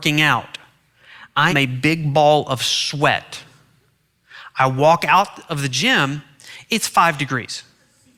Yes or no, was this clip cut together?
yes